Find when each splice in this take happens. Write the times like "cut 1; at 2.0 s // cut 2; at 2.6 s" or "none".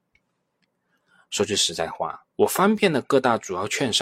cut 1; at 2.3 s